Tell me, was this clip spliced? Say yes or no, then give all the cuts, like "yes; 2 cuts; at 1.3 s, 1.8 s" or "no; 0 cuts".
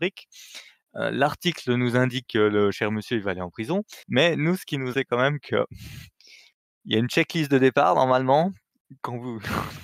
yes; 3 cuts; at 2.3 s, 4.0 s, 4.9 s